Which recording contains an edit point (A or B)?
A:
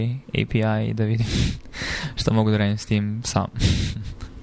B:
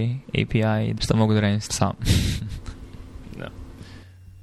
B